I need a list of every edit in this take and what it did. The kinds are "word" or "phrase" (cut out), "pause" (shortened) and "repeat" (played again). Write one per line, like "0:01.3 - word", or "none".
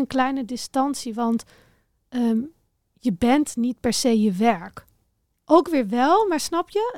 none